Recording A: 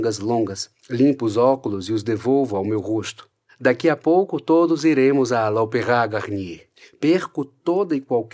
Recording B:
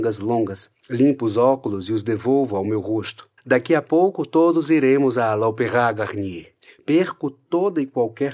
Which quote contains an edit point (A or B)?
B